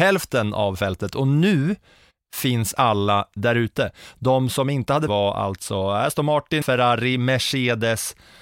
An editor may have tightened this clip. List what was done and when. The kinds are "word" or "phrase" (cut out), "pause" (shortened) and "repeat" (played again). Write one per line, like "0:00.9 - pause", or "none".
0:03.4 - word
0:05.1 - phrase
0:06.6 - word